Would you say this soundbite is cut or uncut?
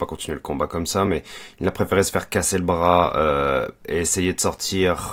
uncut